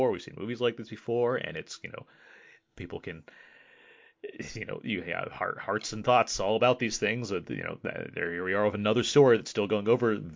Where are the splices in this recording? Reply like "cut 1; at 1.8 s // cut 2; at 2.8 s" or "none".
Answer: none